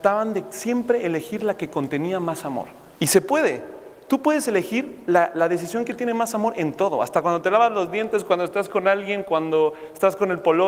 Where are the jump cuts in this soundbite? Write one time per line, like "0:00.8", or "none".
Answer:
0:03.0

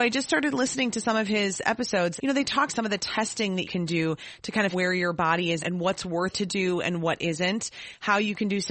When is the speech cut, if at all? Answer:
0:02.2
0:02.7
0:03.6
0:04.7
0:05.6
0:06.3

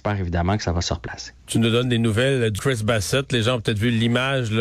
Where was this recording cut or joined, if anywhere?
0:01.4
0:02.6

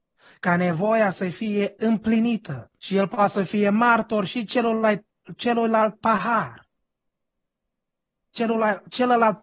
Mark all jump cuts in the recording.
0:02.8

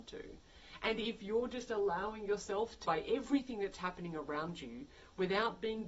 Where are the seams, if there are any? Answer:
0:02.8

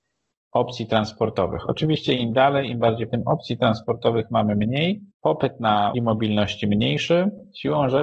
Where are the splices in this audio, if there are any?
0:03.1
0:05.1
0:05.9

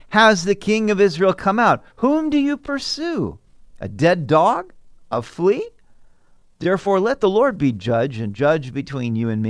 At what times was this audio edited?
none

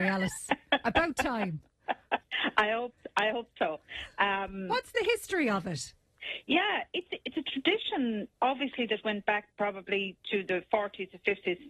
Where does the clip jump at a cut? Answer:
0:08.4

